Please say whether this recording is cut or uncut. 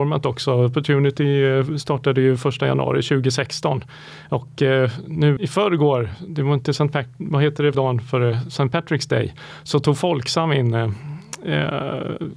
cut